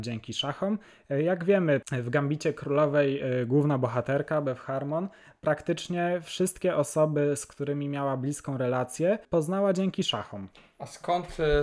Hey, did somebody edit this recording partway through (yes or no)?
no